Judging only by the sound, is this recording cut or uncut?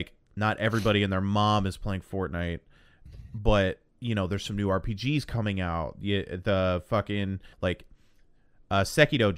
cut